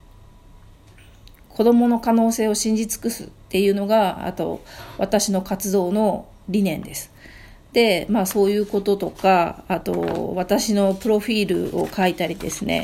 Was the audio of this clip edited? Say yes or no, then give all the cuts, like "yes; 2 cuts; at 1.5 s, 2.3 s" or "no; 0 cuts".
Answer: no; 0 cuts